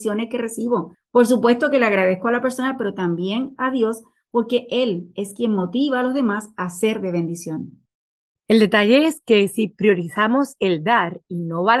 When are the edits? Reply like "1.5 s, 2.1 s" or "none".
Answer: none